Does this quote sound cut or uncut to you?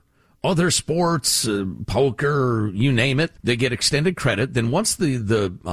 cut